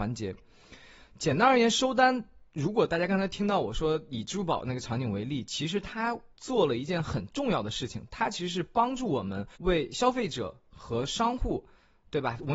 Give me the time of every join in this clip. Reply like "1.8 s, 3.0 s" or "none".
6.3 s, 9.6 s